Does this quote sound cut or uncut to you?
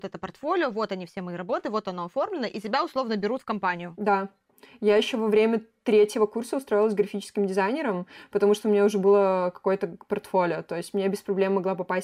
uncut